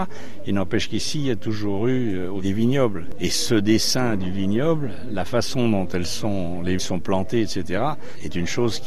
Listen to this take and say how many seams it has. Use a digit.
1